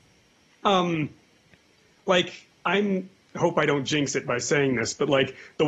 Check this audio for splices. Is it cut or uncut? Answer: uncut